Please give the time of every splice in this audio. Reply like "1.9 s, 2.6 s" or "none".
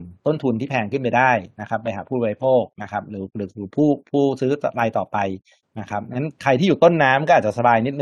none